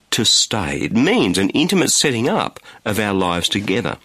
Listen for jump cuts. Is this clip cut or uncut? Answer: uncut